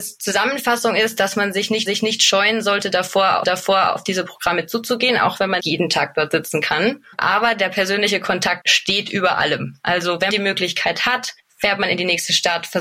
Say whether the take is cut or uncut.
cut